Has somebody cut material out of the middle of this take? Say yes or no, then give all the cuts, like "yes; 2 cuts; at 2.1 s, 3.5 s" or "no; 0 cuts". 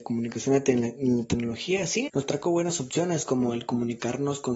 yes; 1 cut; at 2.1 s